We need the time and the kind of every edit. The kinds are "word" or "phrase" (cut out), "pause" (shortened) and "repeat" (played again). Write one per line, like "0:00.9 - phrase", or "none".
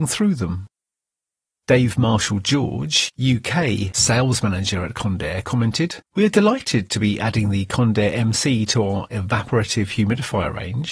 0:06.1 - pause